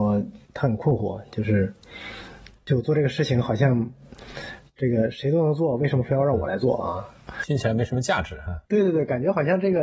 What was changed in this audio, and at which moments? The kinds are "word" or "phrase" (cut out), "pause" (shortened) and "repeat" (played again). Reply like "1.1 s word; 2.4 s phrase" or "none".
8.6 s pause